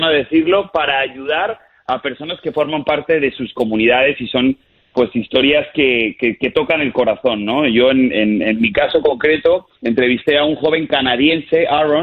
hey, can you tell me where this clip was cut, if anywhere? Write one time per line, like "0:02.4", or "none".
0:09.8